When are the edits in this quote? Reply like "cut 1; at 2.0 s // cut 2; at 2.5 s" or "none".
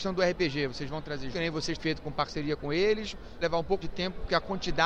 cut 1; at 1.3 s // cut 2; at 1.8 s // cut 3; at 3.4 s // cut 4; at 3.8 s